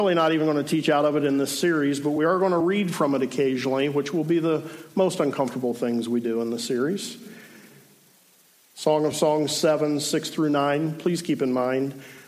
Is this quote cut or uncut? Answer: uncut